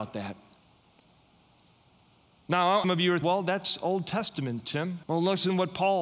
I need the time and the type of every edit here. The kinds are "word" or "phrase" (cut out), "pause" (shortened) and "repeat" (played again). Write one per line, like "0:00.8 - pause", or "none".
0:02.8 - phrase
0:03.2 - word
0:05.0 - pause